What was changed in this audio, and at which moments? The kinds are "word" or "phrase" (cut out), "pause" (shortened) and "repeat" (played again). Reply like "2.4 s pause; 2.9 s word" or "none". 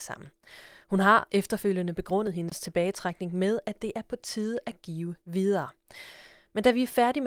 5.2 s word

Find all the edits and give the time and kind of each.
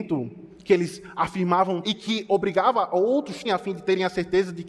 1.8 s word; 3.4 s word

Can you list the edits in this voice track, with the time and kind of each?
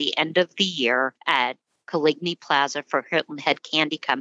none

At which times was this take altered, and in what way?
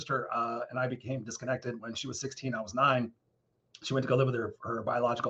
none

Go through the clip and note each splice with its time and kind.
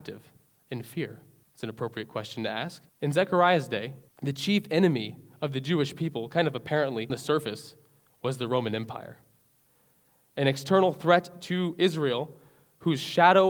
1.4 s pause; 2.9 s pause; 4.1 s pause; 7.1 s word

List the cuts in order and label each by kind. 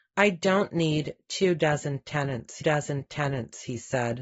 2.6 s repeat

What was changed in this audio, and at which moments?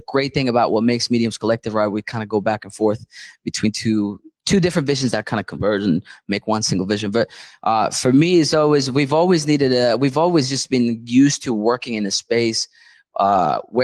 none

